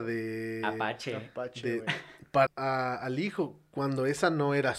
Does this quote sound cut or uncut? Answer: cut